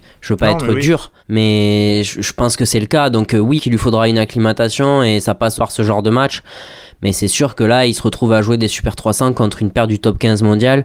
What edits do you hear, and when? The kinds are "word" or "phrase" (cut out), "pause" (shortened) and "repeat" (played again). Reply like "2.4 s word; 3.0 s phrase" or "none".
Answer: 1.2 s pause; 3.6 s word; 5.6 s word